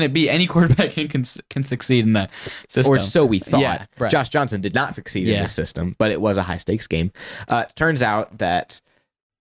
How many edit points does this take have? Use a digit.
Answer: 0